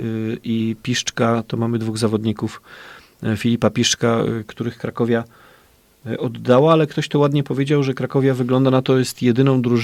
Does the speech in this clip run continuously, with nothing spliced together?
yes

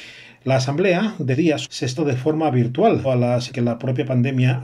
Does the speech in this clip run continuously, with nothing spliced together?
no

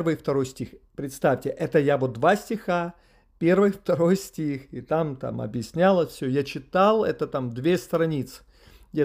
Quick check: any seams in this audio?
no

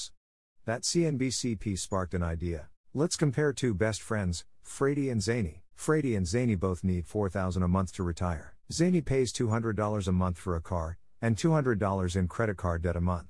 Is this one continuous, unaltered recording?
no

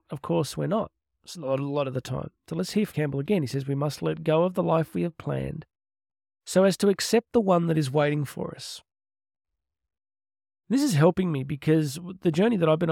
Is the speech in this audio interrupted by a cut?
yes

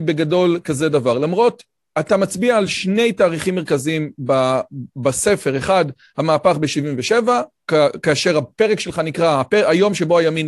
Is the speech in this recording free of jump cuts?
yes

